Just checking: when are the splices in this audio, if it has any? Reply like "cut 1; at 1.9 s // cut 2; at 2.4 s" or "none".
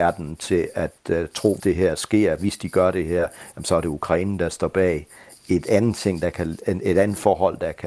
cut 1; at 1.6 s